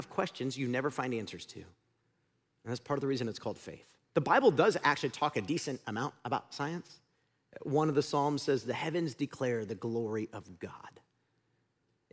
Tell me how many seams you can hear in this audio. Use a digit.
1